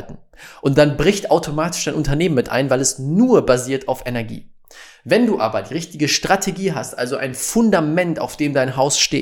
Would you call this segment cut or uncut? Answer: uncut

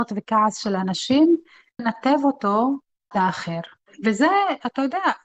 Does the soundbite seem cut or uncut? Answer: cut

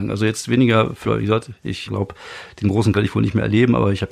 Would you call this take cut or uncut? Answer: cut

